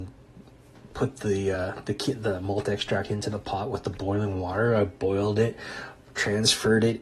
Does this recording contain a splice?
no; 0 cuts

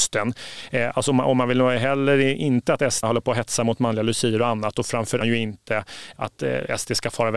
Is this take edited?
yes; 3 cuts; at 3.0 s, 5.2 s, 6.2 s

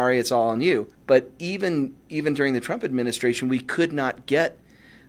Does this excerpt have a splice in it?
yes; 1 cut; at 0.9 s

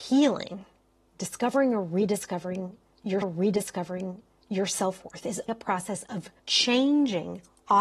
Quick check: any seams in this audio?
yes; 3 cuts; at 3.2 s, 5.5 s, 6.4 s

